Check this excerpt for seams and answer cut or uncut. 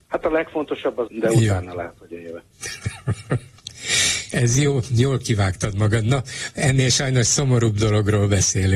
cut